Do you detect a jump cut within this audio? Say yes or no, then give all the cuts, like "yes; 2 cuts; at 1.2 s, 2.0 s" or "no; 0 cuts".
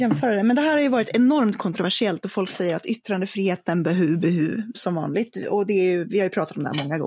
no; 0 cuts